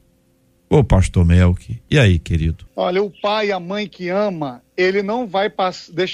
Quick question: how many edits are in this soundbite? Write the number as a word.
one